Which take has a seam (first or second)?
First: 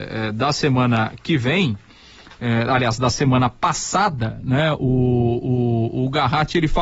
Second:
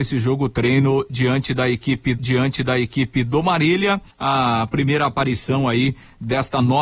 second